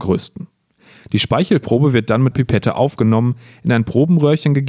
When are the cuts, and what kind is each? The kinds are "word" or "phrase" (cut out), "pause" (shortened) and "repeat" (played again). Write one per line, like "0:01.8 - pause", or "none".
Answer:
0:02.3 - word